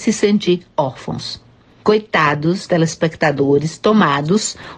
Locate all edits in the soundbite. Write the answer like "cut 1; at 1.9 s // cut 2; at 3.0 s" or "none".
cut 1; at 2.7 s